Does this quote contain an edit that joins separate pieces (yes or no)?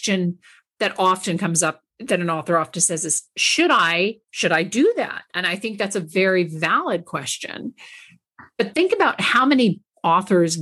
yes